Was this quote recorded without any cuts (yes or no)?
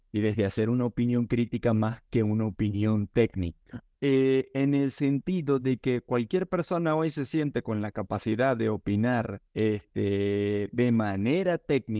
no